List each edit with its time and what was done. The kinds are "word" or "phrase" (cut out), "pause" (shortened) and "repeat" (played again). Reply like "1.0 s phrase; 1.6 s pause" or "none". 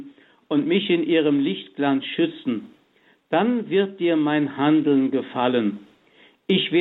none